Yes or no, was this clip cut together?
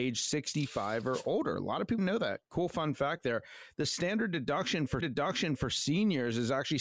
yes